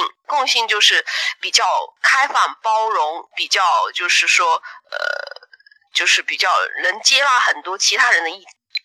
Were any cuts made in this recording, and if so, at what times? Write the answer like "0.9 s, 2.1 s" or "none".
none